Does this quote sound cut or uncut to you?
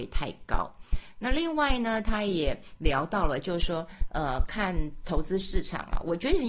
uncut